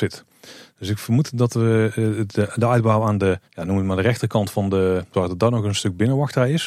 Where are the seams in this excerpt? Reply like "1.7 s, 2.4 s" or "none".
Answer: 3.4 s, 5.1 s